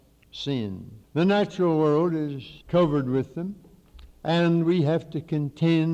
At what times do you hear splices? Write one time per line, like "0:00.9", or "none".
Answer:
0:01.0
0:02.6
0:04.1